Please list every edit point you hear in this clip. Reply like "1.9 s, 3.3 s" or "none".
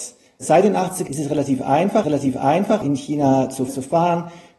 1.1 s, 2.0 s, 3.7 s